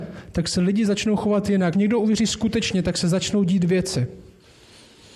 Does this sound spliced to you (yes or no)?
yes